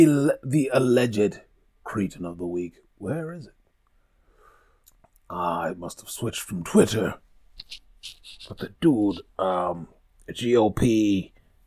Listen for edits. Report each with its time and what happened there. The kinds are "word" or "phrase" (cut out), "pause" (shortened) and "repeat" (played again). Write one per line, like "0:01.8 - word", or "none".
0:01.8 - word
0:04.8 - pause